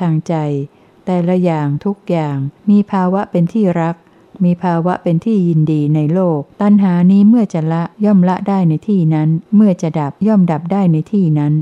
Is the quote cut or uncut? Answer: cut